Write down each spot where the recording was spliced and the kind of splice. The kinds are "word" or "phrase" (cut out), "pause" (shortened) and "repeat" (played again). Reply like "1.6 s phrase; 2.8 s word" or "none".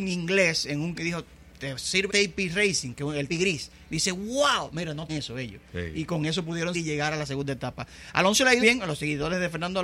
0.9 s word; 2.1 s word; 3.3 s word; 5.1 s word; 6.7 s word; 8.6 s word